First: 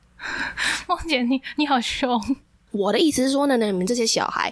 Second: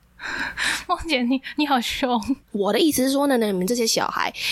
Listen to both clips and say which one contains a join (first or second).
second